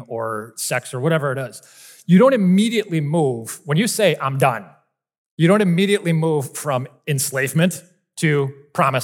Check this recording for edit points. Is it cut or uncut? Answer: uncut